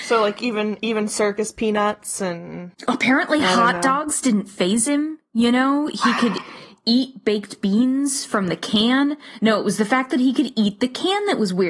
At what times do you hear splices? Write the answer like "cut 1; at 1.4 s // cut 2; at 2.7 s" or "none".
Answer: cut 1; at 2.7 s